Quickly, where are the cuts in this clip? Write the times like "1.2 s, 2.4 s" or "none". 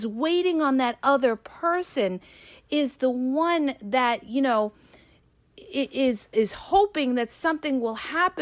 none